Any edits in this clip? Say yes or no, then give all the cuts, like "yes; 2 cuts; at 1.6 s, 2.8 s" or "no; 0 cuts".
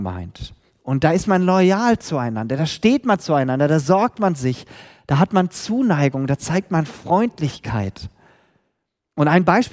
no; 0 cuts